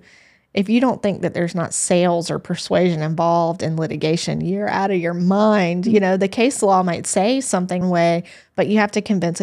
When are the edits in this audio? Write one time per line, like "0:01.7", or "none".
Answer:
0:07.8